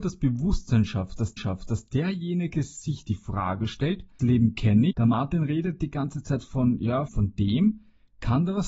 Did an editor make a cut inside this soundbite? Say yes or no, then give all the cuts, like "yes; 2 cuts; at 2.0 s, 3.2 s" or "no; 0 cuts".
yes; 4 cuts; at 1.4 s, 4.2 s, 4.9 s, 7.1 s